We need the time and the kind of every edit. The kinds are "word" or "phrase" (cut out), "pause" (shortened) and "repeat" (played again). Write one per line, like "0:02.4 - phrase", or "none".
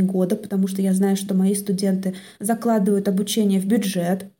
none